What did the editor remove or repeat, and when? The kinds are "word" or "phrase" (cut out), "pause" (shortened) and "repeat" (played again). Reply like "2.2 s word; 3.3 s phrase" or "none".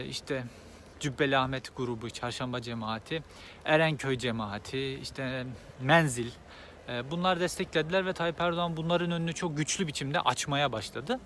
none